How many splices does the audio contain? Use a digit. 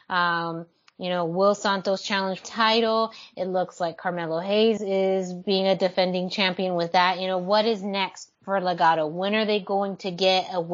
3